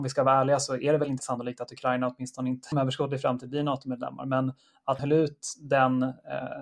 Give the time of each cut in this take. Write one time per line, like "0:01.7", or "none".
0:01.2
0:02.7
0:05.0